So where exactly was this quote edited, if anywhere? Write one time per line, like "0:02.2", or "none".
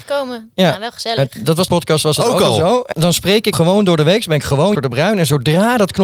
0:01.7
0:02.9
0:03.5
0:04.7